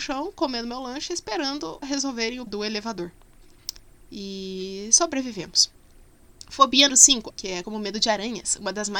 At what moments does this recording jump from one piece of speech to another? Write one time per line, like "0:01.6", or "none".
0:01.8
0:02.5
0:06.9
0:07.3
0:07.6